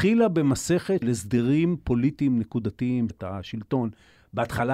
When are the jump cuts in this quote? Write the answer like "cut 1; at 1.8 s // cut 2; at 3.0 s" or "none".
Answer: cut 1; at 1.0 s // cut 2; at 3.1 s